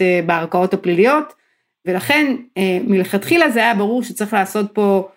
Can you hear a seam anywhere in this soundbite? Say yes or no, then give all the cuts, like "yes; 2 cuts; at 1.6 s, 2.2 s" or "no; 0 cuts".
no; 0 cuts